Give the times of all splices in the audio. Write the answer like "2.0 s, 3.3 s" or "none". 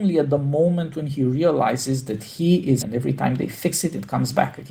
2.8 s